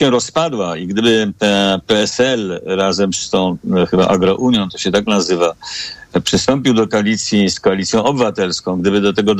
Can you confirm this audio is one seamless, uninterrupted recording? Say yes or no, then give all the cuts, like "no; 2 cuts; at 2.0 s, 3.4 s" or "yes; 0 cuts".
yes; 0 cuts